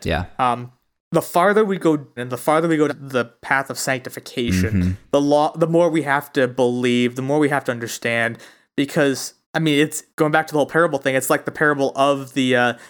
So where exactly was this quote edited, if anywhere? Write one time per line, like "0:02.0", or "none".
0:01.0
0:02.2
0:02.9
0:09.4
0:10.1